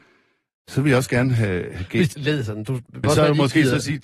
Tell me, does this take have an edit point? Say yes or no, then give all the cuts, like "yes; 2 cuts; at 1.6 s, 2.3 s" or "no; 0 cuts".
yes; 2 cuts; at 2.1 s, 3.0 s